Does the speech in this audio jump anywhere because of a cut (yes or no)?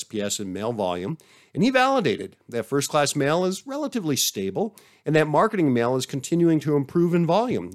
no